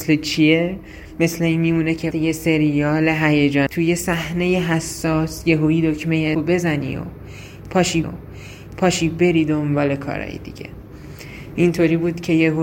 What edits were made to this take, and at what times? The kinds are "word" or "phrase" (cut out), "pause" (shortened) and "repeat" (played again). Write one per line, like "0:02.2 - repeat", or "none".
0:02.1 - word
0:03.7 - word
0:06.3 - word
0:08.0 - repeat